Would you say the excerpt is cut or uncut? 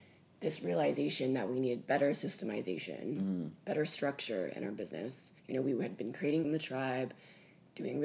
cut